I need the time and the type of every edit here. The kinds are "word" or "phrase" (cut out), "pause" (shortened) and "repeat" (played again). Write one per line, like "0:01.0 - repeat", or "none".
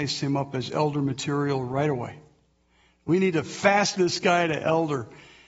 0:03.9 - word